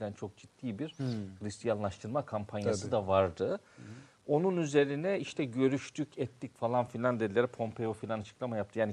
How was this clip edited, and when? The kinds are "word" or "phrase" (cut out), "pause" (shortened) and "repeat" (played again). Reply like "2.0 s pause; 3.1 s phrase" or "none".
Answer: none